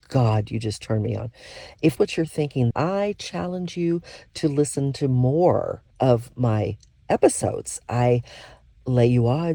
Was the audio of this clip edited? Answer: yes; 3 cuts; at 2.0 s, 2.7 s, 5.9 s

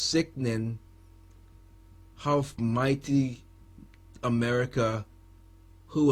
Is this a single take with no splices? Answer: yes; 0 cuts

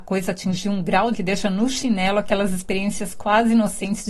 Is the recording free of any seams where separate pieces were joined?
no; 1 cut; at 1.1 s

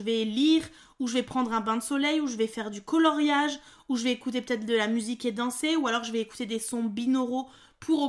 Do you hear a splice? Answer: no; 0 cuts

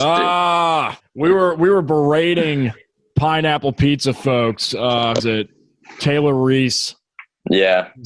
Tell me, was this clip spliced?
yes; 2 cuts; at 1.0 s, 5.2 s

